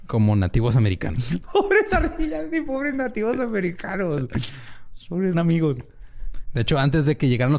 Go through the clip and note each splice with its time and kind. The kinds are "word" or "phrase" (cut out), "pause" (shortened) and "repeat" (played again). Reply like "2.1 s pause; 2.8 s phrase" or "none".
5.3 s word

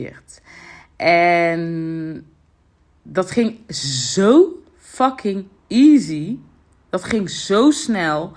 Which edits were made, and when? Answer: none

